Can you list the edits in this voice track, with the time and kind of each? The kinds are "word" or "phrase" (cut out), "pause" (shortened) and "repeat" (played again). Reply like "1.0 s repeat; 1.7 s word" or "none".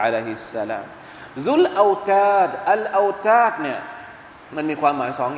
4.3 s pause

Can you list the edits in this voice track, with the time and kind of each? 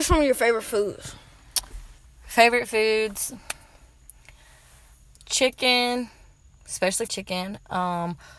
7.1 s word

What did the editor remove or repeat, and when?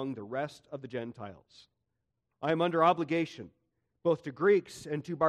none

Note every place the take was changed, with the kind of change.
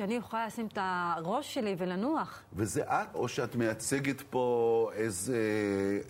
3.1 s word

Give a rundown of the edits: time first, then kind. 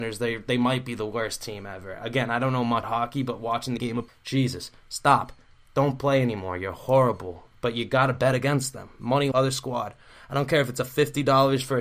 2.8 s word; 3.8 s phrase; 4.1 s word; 9.3 s word

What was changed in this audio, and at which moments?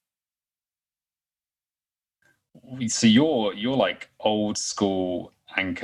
none

